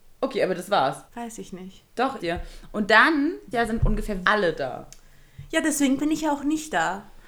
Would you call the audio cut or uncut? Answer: cut